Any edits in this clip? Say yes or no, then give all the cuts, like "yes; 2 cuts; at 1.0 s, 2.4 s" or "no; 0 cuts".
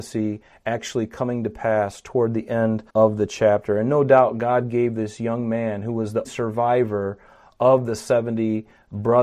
yes; 2 cuts; at 2.9 s, 6.2 s